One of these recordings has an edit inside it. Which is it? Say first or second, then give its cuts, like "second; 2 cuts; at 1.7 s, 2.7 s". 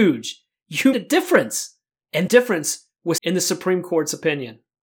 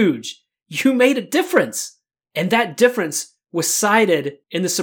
first; 3 cuts; at 0.9 s, 2.3 s, 3.2 s